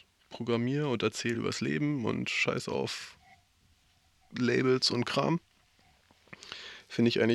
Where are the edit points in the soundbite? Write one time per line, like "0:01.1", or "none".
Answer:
none